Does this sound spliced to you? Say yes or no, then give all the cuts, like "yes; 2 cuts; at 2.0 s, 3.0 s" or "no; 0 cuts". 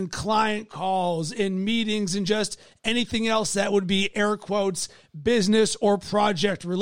no; 0 cuts